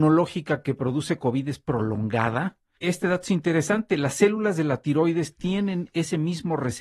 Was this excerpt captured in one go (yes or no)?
no